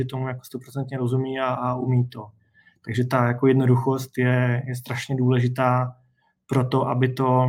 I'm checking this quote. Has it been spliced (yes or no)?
no